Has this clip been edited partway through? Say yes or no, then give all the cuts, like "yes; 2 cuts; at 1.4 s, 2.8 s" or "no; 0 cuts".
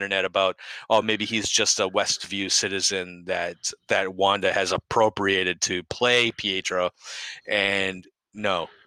no; 0 cuts